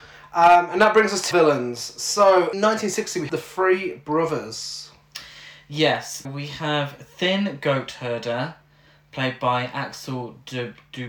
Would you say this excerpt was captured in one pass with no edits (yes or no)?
no